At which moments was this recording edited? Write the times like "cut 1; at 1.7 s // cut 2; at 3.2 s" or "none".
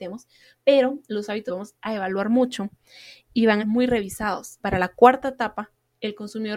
cut 1; at 1.5 s // cut 2; at 3.6 s // cut 3; at 4.6 s